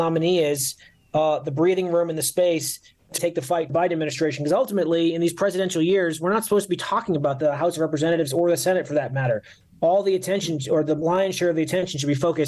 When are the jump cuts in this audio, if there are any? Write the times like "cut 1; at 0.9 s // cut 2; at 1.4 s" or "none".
cut 1; at 3.2 s // cut 2; at 3.7 s